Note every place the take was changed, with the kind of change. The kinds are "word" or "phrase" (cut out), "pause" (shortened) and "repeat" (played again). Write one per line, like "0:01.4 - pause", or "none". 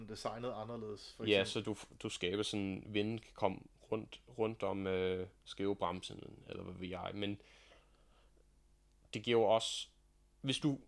none